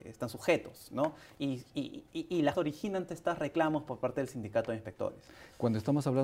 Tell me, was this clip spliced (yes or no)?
yes